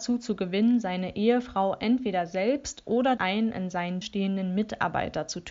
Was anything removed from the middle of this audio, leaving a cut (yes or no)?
yes